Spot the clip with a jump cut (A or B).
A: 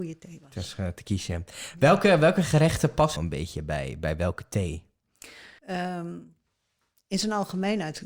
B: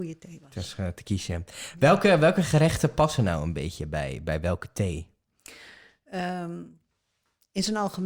A